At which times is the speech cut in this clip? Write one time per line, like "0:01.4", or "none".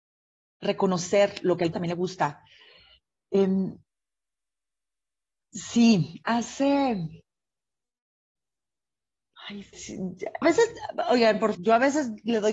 0:01.7
0:09.7
0:10.4
0:11.5